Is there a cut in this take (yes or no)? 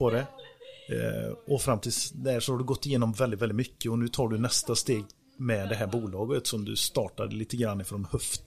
no